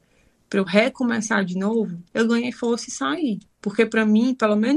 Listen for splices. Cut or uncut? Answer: cut